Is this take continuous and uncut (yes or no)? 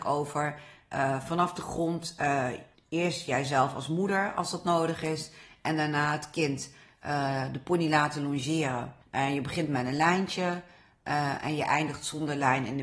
no